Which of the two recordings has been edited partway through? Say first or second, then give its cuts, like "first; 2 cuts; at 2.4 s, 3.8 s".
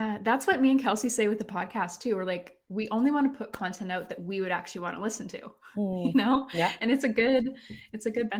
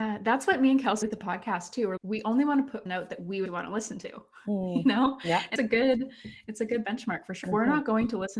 second; 6 cuts; at 1.0 s, 2.0 s, 2.9 s, 3.5 s, 5.6 s, 7.4 s